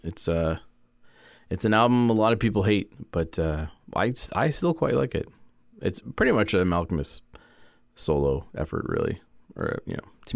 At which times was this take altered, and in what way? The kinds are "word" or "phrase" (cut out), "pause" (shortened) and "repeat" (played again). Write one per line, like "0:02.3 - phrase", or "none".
none